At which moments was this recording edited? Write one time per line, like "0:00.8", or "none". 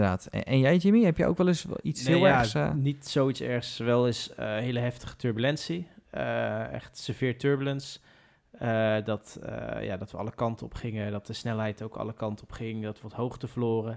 0:13.0